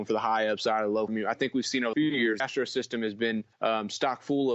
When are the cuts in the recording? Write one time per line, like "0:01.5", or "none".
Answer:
0:01.1
0:01.9
0:02.4
0:03.5